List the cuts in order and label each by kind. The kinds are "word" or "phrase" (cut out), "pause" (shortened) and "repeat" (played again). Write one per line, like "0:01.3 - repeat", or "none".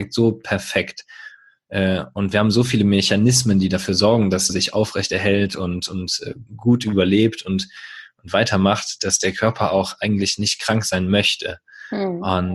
0:04.5 - phrase
0:06.5 - pause